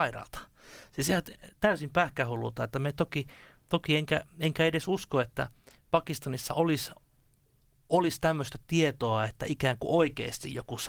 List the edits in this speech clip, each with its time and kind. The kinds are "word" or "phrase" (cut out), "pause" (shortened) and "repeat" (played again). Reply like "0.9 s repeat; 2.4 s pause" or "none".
none